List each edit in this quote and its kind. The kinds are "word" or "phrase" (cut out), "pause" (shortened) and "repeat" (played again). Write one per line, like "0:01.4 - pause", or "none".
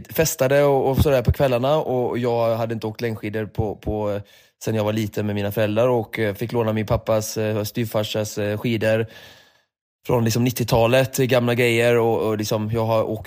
none

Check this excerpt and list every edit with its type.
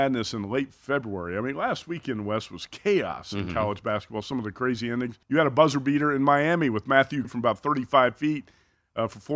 0:05.2 - pause
0:07.2 - phrase

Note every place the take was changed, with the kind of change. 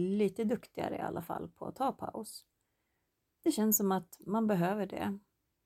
none

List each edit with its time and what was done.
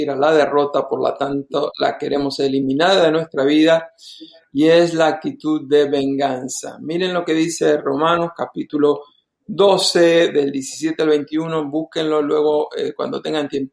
none

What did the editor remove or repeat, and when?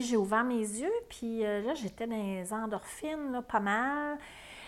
none

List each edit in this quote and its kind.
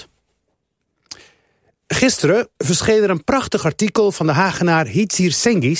0:02.5 - pause

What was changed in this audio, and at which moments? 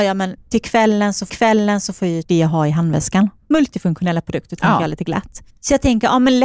0:01.3 - repeat
0:02.2 - word
0:03.4 - pause
0:05.5 - pause

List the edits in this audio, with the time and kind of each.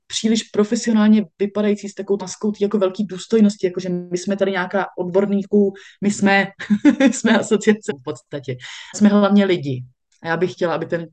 0:02.2 - word
0:04.9 - word
0:07.9 - word
0:08.9 - word

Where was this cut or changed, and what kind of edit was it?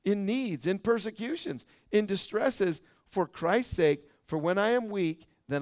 none

